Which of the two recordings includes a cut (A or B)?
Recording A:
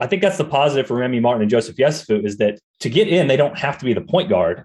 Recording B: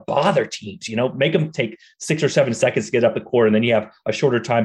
A